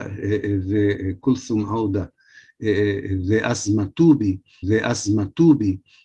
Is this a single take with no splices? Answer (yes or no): no